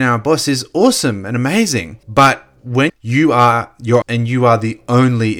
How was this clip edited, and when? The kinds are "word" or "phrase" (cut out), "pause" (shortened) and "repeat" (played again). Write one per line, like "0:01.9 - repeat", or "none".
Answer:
0:02.0 - pause
0:02.9 - phrase
0:04.0 - phrase